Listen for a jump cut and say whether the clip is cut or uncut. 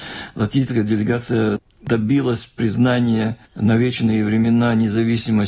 cut